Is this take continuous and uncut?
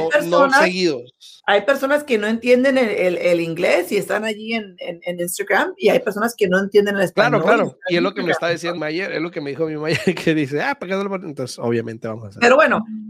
no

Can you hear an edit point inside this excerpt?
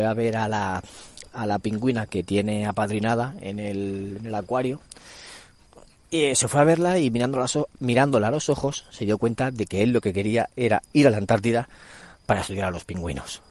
no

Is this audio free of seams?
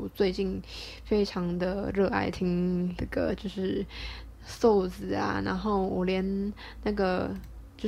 no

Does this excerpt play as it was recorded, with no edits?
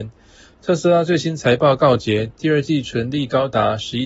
yes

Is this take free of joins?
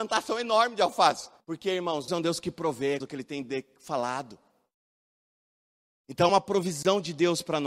no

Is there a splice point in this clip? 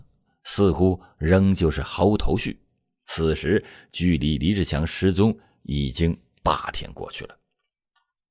no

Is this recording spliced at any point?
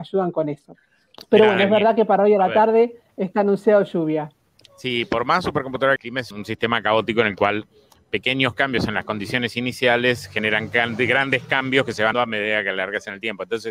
yes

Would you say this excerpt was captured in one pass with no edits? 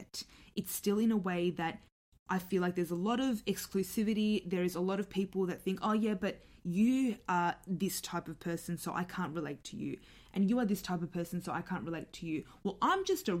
yes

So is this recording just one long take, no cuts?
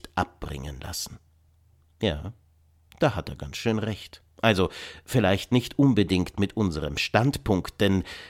yes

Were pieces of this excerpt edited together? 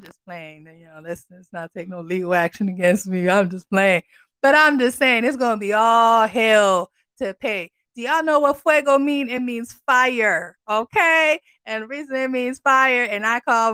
no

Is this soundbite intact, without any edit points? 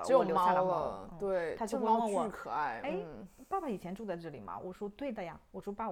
yes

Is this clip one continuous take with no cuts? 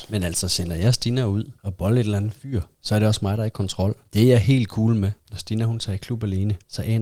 yes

